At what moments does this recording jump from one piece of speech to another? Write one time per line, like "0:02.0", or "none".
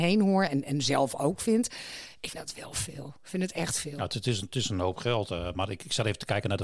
0:02.3